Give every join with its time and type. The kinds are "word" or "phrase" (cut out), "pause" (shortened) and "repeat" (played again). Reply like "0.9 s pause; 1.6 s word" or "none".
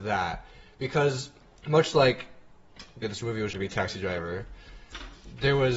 1.4 s pause; 3.0 s phrase; 3.5 s word